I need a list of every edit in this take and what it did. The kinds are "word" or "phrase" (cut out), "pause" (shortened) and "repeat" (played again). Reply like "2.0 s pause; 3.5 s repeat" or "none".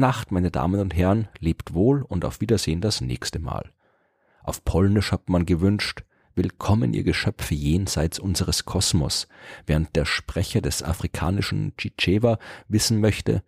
none